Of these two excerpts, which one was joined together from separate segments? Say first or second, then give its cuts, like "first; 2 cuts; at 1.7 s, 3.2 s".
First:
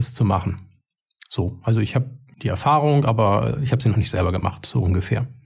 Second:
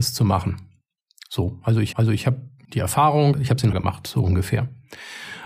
second; 3 cuts; at 1.9 s, 3.3 s, 3.7 s